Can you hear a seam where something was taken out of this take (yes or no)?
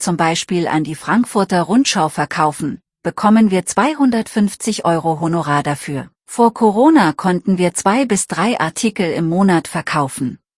yes